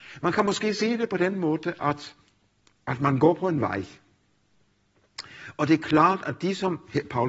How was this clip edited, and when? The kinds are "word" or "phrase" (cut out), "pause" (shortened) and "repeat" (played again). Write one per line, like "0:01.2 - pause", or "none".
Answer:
0:02.6 - pause